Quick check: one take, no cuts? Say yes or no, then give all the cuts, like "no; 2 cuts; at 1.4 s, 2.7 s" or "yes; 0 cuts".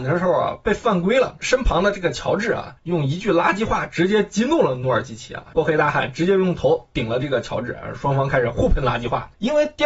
no; 1 cut; at 2.8 s